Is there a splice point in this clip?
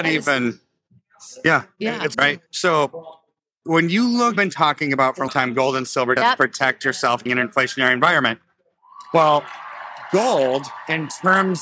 yes; 6 cuts; at 2.1 s, 2.5 s, 4.4 s, 5.3 s, 6.2 s, 7.3 s

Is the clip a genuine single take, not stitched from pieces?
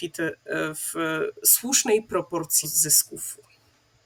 no; 1 cut; at 2.6 s

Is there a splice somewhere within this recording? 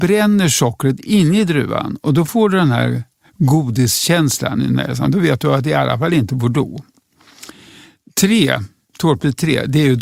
no; 0 cuts

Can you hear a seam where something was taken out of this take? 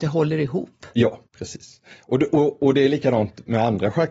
yes; 1 cut; at 1.3 s

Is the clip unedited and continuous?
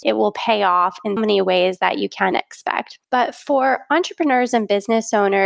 no; 3 cuts; at 1.2 s, 2.3 s, 3.0 s

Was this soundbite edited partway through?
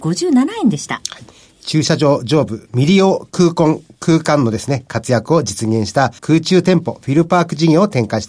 yes; 1 cut; at 6.2 s

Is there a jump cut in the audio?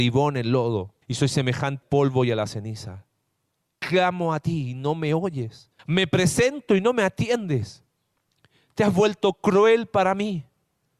yes; 3 cuts; at 1.0 s, 1.8 s, 5.8 s

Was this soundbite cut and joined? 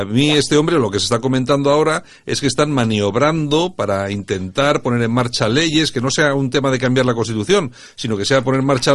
no; 0 cuts

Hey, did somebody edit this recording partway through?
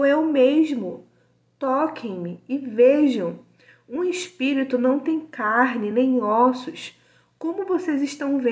no; 0 cuts

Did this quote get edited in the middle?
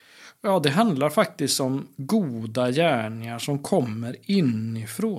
no; 0 cuts

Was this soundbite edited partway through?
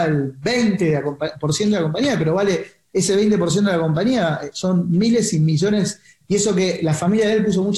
no; 0 cuts

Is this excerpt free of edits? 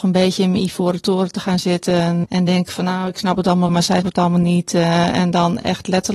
no; 3 cuts; at 2.2 s, 3.7 s, 4.0 s

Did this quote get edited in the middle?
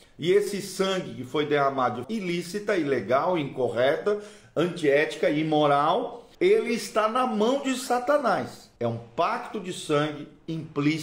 yes; 3 cuts; at 2.0 s, 6.3 s, 8.8 s

